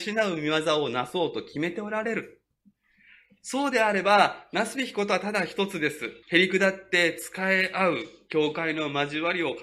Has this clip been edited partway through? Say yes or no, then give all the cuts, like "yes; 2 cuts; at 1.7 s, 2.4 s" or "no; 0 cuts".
yes; 1 cut; at 6.2 s